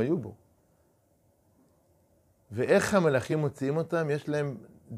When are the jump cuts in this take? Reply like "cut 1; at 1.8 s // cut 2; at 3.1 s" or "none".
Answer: none